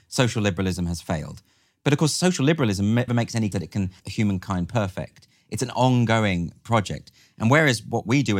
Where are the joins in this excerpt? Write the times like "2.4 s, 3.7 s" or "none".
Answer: 3.1 s, 3.5 s, 4.0 s